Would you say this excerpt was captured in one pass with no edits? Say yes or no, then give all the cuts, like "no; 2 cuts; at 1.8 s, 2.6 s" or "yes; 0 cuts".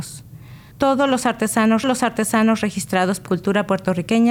no; 2 cuts; at 1.8 s, 3.3 s